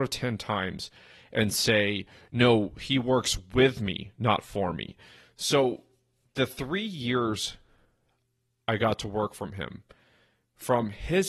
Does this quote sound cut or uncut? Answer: uncut